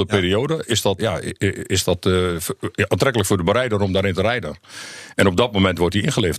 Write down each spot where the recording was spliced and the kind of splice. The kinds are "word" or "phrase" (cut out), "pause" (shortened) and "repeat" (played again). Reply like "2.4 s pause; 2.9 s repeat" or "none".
1.0 s word